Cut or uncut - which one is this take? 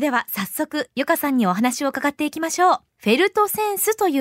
cut